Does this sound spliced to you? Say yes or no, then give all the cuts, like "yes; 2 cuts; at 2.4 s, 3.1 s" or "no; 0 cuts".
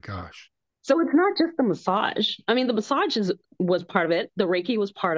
no; 0 cuts